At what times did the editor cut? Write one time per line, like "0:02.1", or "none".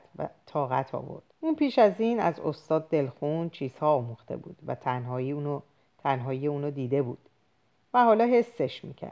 0:01.3